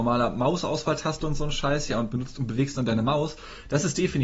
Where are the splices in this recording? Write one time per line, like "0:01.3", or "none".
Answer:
none